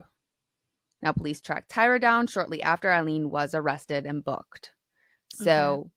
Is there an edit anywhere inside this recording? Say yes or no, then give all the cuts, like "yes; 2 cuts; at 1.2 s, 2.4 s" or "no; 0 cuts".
no; 0 cuts